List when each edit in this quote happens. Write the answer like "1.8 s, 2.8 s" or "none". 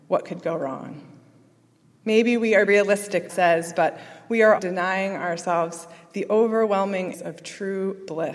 2.7 s, 3.3 s, 4.6 s, 7.1 s